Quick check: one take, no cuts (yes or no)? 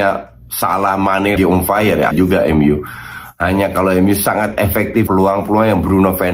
no